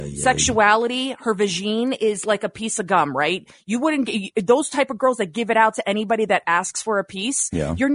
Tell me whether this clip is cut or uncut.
uncut